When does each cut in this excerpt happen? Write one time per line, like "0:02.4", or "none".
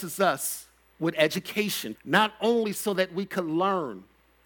0:01.9